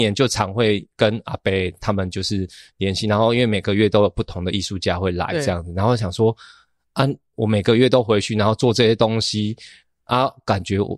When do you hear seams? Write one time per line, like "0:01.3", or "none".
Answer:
none